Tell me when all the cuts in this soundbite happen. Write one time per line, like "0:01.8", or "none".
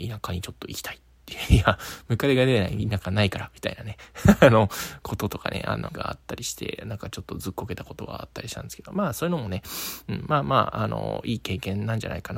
0:05.9